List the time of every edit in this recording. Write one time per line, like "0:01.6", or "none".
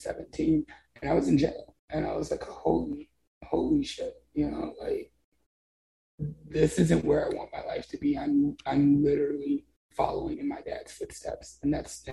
0:01.8

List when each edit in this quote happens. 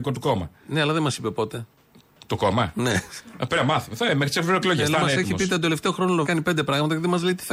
0:06.2

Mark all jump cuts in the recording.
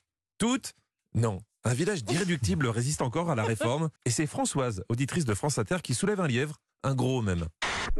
0:04.0

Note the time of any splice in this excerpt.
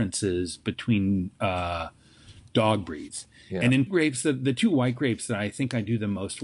0:03.9

